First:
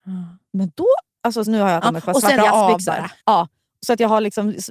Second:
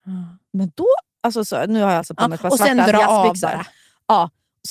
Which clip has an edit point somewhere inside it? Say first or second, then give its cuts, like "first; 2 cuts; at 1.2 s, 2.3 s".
first; 4 cuts; at 1.5 s, 1.8 s, 2.4 s, 3.2 s